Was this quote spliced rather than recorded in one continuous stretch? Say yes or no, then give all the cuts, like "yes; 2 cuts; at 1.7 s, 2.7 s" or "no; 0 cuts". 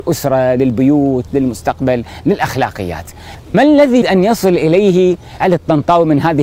yes; 4 cuts; at 1.3 s, 3.5 s, 4.0 s, 5.4 s